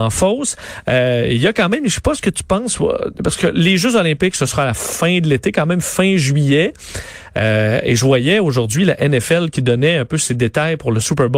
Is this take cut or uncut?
uncut